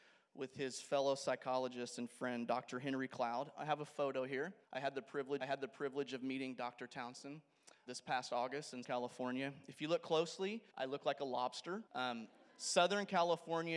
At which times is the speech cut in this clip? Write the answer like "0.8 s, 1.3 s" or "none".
4.6 s, 5.4 s, 7.9 s, 8.8 s, 10.7 s, 11.9 s